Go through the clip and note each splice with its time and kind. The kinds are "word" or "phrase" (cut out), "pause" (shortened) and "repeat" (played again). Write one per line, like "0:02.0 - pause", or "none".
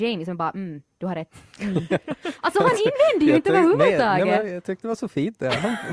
none

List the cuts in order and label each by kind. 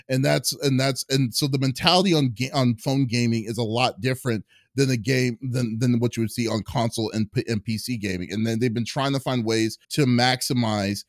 0:09.8 - pause

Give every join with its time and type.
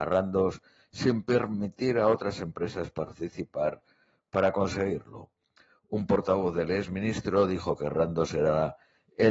none

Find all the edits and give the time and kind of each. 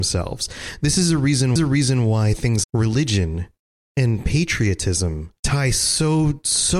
0:01.6 - repeat
0:02.6 - word
0:05.4 - pause

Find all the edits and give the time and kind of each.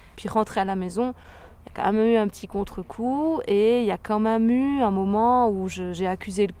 none

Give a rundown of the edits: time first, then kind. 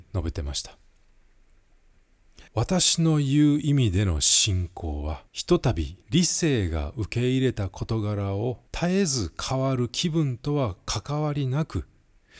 0:02.5 - pause
0:05.3 - pause
0:06.0 - pause
0:08.7 - pause

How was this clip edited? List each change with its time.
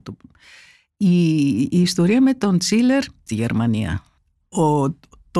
0:03.3 - phrase

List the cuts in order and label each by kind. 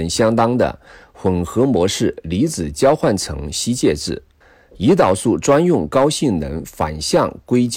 0:04.4 - pause

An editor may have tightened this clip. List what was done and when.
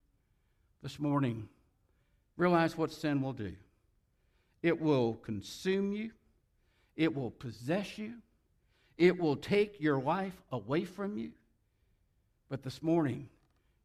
none

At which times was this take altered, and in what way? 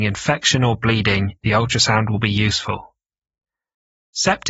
0:01.4 - pause

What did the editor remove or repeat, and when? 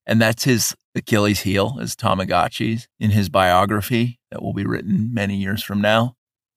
0:02.9 - pause
0:04.2 - pause

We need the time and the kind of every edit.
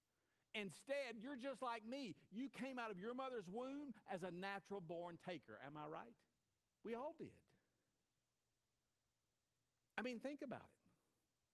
0:06.6 - pause

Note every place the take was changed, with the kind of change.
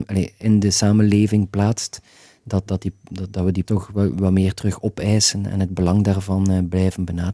0:02.7 - word
0:03.6 - word

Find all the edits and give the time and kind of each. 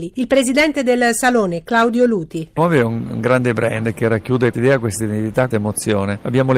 0:02.6 - word
0:04.5 - word
0:05.5 - word

